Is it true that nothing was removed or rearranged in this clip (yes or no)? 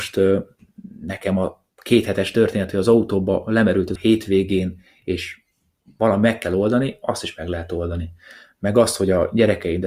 no